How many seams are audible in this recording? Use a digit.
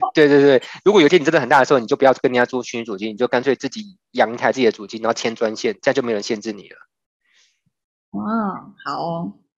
0